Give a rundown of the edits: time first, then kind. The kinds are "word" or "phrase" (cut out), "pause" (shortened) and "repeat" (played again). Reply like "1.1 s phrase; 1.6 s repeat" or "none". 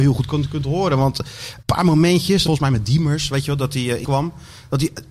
1.6 s word; 2.5 s word; 4.0 s word

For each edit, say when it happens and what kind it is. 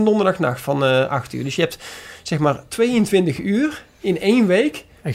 none

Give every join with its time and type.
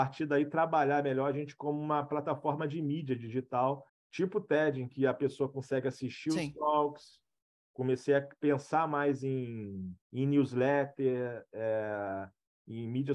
3.9 s pause; 10.0 s pause

